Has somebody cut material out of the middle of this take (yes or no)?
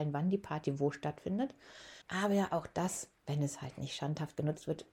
yes